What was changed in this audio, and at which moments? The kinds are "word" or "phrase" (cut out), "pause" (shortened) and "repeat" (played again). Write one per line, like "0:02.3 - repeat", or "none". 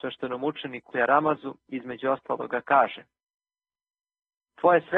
0:00.9 - word